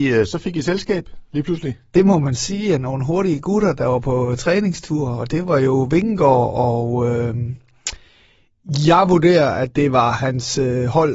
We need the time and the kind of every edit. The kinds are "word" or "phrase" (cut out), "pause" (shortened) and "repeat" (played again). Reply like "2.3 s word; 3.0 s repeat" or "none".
none